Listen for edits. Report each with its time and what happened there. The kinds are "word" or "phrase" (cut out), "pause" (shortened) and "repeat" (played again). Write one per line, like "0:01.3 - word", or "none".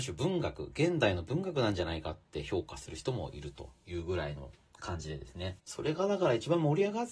0:05.6 - pause